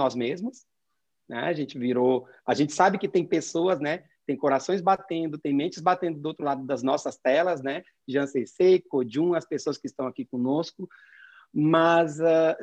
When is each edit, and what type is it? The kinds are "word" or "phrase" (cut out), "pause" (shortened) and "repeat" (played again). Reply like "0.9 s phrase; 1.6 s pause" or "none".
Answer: none